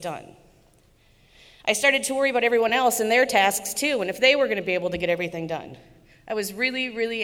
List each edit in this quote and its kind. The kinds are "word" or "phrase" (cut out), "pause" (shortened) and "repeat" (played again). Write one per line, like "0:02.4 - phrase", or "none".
none